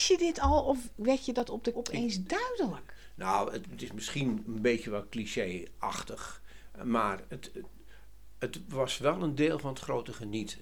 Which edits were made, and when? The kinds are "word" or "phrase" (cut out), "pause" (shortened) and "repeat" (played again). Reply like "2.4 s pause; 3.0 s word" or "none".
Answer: 1.7 s word; 3.6 s word